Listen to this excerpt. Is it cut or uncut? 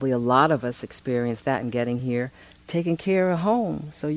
uncut